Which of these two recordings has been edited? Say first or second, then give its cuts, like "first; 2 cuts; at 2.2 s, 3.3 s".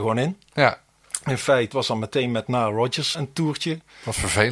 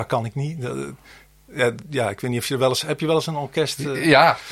first; 2 cuts; at 1.7 s, 3.1 s